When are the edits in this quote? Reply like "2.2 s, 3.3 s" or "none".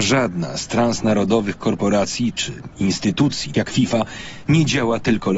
3.5 s